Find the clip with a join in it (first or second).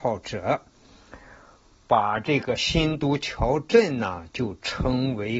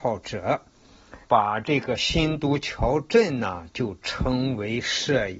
second